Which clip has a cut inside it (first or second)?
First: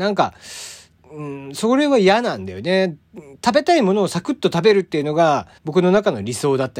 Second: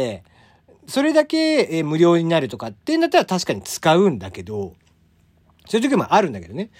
first